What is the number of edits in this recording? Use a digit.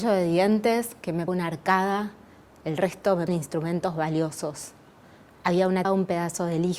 3